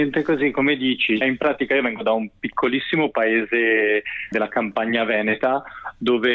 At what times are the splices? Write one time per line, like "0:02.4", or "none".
0:01.2
0:04.3